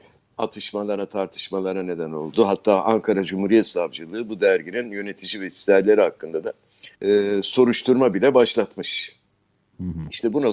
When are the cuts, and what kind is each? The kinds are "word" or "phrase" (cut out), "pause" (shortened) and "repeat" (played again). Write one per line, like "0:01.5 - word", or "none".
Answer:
0:06.9 - pause